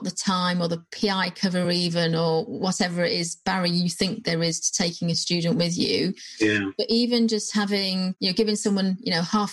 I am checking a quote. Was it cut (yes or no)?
no